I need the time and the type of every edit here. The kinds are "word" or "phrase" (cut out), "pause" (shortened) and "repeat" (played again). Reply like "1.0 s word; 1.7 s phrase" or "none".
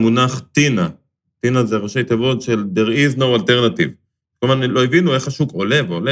none